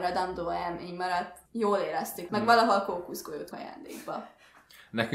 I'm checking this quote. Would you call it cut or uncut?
cut